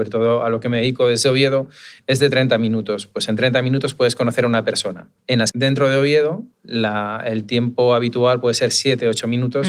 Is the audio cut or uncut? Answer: cut